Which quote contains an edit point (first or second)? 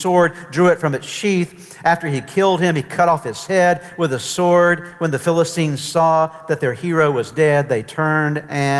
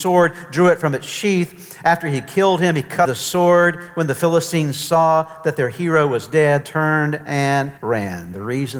second